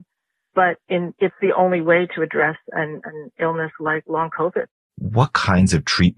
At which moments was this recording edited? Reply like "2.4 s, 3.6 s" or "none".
none